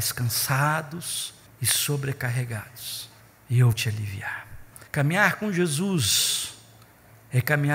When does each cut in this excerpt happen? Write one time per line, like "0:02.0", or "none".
0:01.5
0:03.2
0:03.7
0:04.9